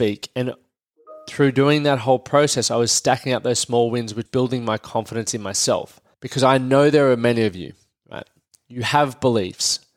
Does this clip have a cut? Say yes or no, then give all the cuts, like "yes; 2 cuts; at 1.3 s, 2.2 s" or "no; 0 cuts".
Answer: yes; 2 cuts; at 4.3 s, 6.1 s